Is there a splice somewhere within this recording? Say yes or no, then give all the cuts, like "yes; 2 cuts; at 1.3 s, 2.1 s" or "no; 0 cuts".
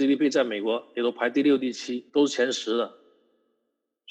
yes; 1 cut; at 2.1 s